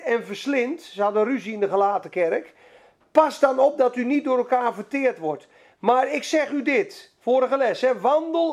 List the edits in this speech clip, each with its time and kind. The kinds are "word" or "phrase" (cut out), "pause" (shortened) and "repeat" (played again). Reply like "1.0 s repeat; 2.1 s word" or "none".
none